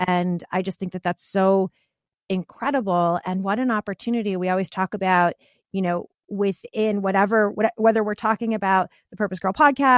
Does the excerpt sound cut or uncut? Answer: uncut